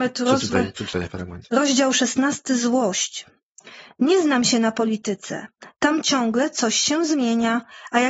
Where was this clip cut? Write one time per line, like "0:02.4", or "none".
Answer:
0:01.4